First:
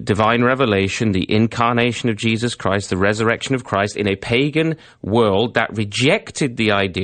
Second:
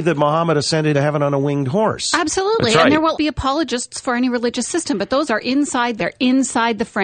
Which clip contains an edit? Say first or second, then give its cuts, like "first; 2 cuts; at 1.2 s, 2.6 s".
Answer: second; 4 cuts; at 0.9 s, 3.1 s, 5.3 s, 6.0 s